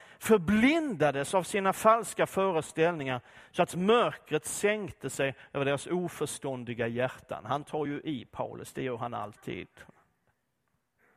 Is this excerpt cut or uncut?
uncut